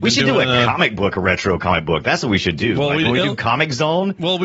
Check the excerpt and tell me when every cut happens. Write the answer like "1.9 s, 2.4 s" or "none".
none